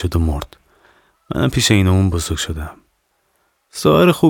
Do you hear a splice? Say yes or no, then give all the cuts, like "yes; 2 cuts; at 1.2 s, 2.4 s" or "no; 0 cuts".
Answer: no; 0 cuts